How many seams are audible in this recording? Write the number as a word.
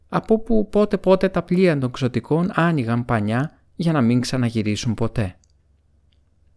zero